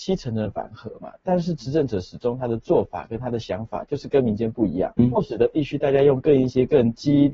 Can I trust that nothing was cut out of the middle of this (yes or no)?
no